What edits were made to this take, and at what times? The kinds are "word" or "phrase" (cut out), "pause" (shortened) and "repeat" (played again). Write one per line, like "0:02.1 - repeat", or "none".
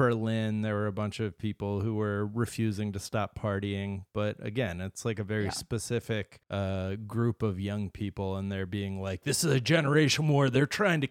0:06.4 - pause